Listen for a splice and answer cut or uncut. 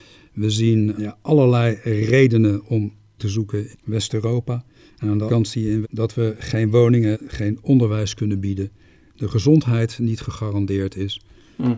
cut